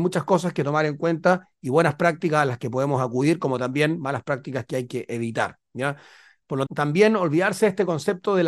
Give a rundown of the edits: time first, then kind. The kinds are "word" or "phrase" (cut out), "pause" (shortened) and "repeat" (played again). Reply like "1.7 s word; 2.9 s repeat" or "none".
6.7 s word